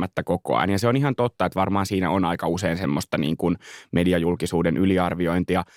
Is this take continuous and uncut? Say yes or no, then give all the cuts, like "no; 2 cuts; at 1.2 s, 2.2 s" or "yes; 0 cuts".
yes; 0 cuts